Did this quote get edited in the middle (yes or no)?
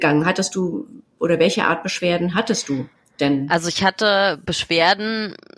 no